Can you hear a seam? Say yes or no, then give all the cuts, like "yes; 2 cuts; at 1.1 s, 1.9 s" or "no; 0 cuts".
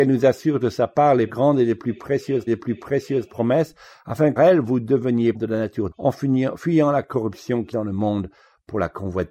yes; 6 cuts; at 1.3 s, 2.5 s, 4.4 s, 5.3 s, 5.9 s, 7.7 s